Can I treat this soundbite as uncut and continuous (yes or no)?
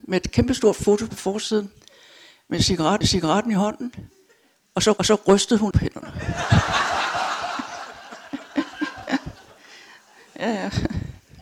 no